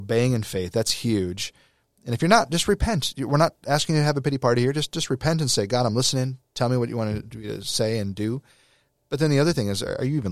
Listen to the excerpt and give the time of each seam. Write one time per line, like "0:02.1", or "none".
none